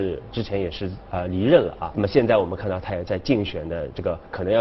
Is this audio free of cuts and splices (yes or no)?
no